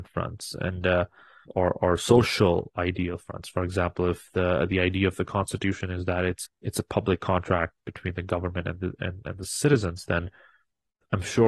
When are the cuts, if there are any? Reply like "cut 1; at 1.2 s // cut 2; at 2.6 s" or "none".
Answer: cut 1; at 1.5 s // cut 2; at 6.4 s